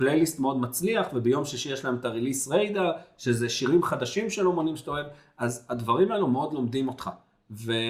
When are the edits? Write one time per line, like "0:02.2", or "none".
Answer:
none

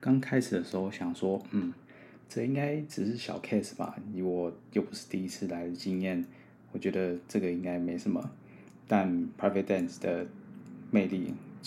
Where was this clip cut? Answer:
none

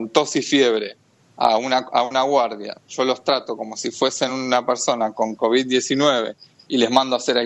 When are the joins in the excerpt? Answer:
none

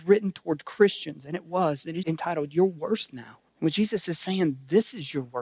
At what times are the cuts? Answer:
0:02.0
0:03.1
0:03.5

